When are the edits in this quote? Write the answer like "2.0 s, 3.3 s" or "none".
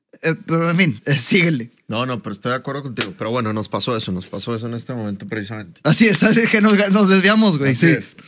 1.0 s